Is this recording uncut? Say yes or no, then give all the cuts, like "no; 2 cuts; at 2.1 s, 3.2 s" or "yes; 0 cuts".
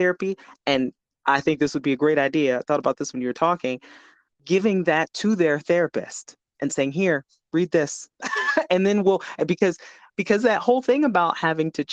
yes; 0 cuts